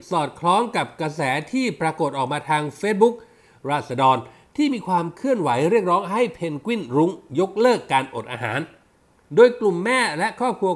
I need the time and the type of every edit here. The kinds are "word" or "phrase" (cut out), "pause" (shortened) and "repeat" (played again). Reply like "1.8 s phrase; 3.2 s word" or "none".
none